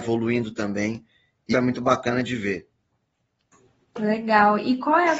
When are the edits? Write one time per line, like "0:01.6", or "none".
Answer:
0:01.5